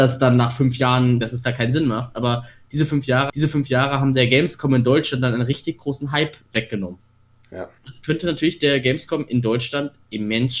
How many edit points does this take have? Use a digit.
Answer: 3